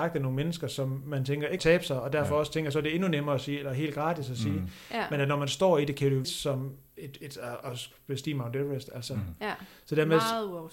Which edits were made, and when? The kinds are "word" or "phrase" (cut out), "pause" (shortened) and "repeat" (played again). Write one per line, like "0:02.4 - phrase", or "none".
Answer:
0:01.6 - phrase
0:06.2 - phrase
0:06.9 - pause